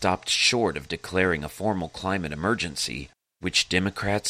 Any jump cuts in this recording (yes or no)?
no